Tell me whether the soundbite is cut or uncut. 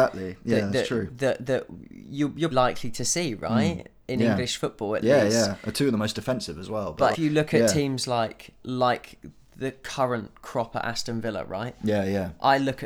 cut